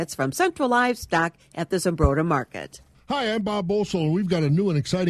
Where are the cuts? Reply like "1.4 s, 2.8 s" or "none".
none